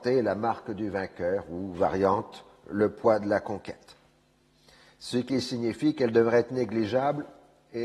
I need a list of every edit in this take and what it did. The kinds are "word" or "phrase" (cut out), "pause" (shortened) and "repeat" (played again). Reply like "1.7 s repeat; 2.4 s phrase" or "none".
none